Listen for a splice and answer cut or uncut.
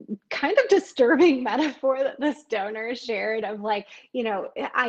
uncut